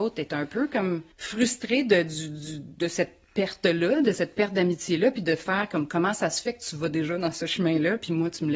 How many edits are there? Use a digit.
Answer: 1